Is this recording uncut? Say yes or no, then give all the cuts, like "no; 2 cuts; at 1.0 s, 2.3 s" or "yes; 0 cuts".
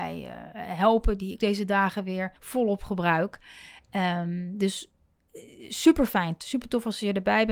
no; 2 cuts; at 1.4 s, 2.4 s